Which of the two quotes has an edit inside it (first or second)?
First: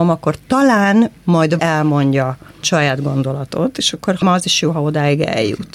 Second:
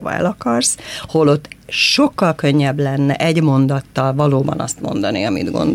first